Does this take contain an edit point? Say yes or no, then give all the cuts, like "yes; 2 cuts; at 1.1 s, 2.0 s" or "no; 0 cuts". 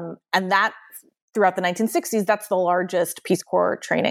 no; 0 cuts